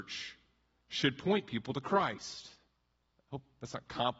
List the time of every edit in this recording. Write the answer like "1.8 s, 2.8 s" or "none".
none